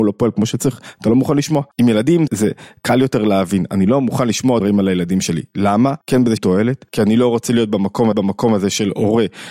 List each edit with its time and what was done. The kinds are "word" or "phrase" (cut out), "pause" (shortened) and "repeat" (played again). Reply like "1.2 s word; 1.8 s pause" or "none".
1.7 s pause; 2.3 s word; 4.6 s word; 6.0 s pause; 6.4 s word; 6.9 s pause; 8.1 s repeat